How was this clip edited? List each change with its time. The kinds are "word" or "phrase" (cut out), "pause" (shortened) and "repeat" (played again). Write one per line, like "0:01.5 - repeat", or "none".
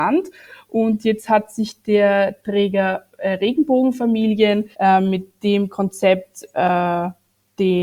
0:04.7 - pause